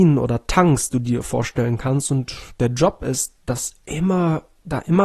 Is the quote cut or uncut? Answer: uncut